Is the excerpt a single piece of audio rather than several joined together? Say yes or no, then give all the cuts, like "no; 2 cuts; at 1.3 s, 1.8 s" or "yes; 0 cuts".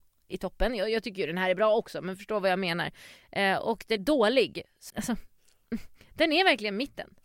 no; 3 cuts; at 4.0 s, 4.9 s, 5.4 s